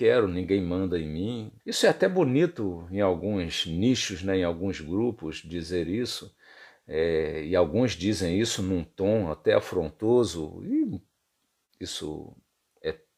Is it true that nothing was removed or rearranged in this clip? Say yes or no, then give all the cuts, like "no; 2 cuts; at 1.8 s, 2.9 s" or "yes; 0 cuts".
no; 1 cut; at 1.6 s